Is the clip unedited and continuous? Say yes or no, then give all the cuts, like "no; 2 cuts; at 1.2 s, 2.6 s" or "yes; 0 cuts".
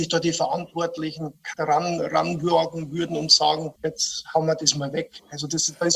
no; 2 cuts; at 1.5 s, 3.8 s